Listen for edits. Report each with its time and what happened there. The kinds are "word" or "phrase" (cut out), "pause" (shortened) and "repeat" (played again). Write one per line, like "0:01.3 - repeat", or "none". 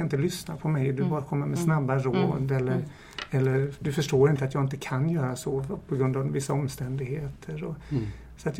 none